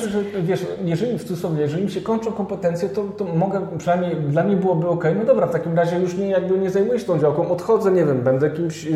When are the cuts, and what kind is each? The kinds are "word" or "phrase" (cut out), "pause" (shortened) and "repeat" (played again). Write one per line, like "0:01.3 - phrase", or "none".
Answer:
none